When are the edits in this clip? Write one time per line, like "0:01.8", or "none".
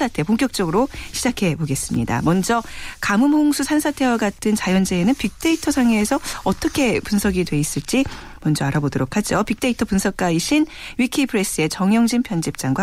none